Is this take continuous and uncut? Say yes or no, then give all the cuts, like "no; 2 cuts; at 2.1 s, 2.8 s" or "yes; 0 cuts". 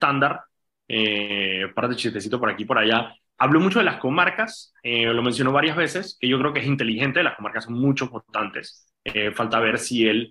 yes; 0 cuts